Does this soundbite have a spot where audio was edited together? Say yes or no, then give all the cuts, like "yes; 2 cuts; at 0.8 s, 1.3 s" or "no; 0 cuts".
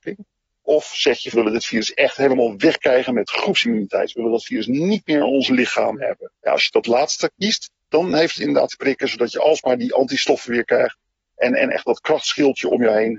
yes; 3 cuts; at 1.3 s, 6.3 s, 8.7 s